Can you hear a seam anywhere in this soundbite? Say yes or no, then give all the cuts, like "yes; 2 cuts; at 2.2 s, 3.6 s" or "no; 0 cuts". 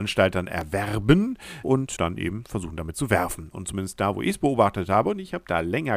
yes; 2 cuts; at 1.6 s, 2.0 s